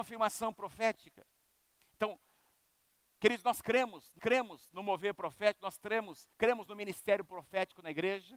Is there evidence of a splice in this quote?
yes; 2 cuts; at 4.2 s, 6.3 s

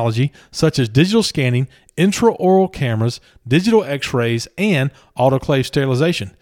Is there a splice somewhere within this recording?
no; 0 cuts

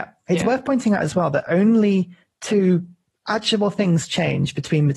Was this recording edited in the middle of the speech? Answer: no; 0 cuts

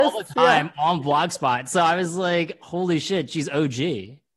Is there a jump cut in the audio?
no; 0 cuts

